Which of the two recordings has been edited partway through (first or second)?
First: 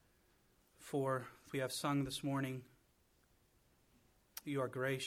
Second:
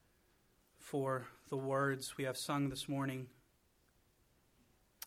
first